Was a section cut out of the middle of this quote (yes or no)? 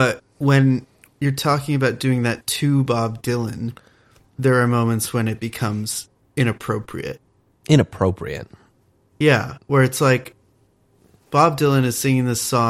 no